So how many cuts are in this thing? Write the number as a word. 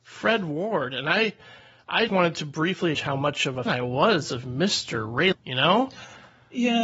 four